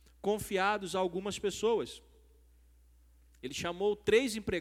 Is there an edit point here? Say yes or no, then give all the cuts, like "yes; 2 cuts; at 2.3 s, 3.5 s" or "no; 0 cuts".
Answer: no; 0 cuts